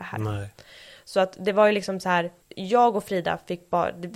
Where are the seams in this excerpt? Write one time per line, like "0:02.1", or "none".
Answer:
0:02.4